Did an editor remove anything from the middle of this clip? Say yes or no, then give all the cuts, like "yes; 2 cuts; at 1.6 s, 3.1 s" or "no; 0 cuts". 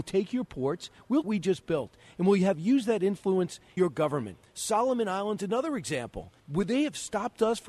yes; 3 cuts; at 1.2 s, 3.8 s, 6.4 s